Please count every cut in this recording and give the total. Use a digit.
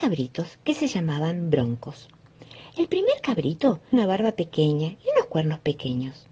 1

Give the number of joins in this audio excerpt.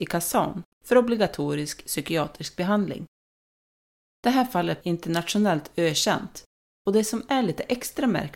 1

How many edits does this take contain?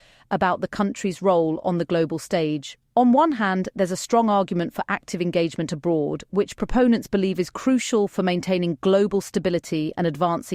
0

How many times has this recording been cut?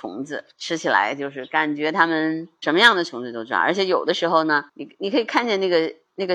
1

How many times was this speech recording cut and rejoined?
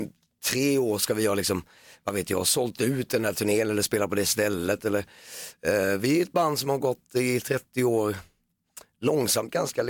0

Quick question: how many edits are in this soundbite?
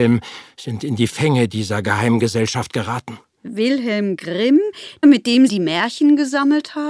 2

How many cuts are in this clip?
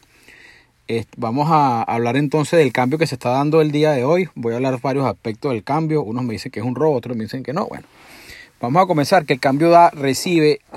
0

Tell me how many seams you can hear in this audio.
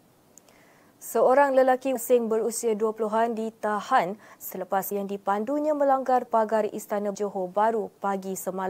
4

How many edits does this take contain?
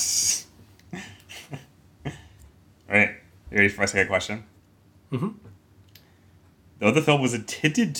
0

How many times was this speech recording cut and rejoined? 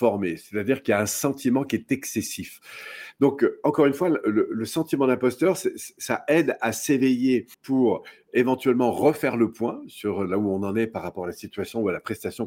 1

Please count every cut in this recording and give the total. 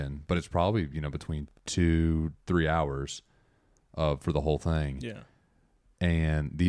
0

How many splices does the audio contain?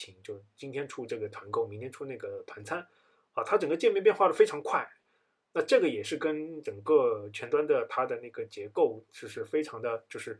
0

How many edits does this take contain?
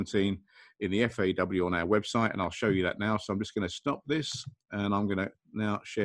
0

